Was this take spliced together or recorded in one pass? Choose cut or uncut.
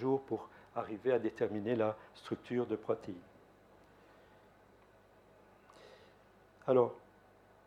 uncut